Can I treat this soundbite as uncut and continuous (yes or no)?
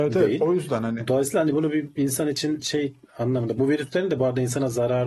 yes